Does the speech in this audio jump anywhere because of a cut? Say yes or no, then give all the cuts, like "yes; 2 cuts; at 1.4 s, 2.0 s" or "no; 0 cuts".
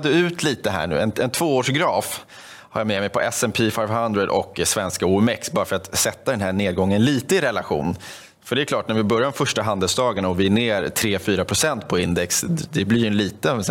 no; 0 cuts